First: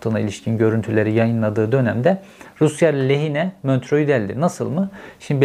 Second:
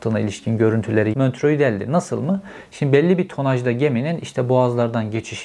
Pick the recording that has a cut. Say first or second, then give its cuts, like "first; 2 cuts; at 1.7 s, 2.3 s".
second; 1 cut; at 1.1 s